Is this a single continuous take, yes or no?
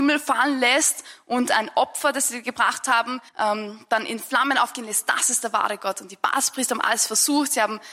no